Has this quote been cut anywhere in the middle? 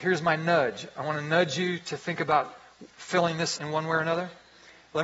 yes; 1 cut; at 3.6 s

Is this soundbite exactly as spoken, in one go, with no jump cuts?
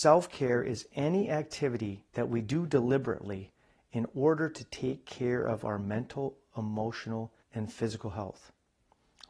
no; 2 cuts; at 2.1 s, 7.4 s

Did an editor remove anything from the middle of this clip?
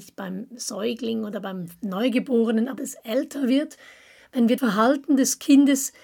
yes; 2 cuts; at 2.8 s, 4.6 s

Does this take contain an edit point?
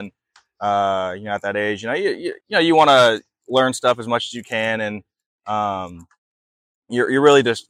yes; 1 cut; at 2.4 s

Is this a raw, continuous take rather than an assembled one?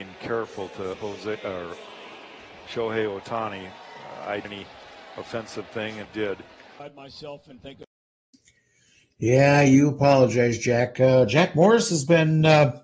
no; 3 cuts; at 0.9 s, 4.4 s, 6.0 s

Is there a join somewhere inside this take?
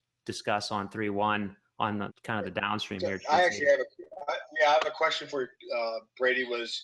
yes; 1 cut; at 2.1 s

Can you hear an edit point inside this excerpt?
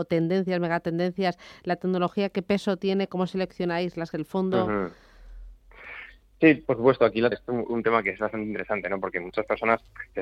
yes; 2 cuts; at 4.1 s, 7.3 s

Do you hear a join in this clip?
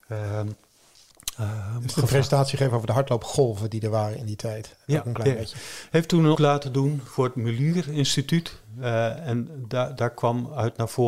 yes; 1 cut; at 6.3 s

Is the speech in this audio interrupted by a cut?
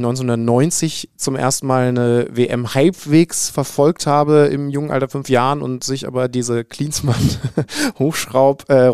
yes; 1 cut; at 5.2 s

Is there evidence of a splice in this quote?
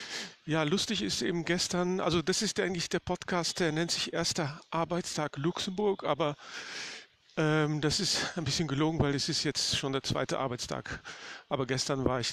no; 0 cuts

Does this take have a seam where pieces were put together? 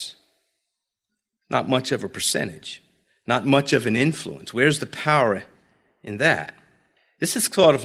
no; 0 cuts

